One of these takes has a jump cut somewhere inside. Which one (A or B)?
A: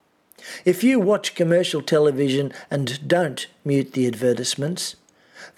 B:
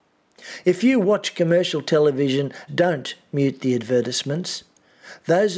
B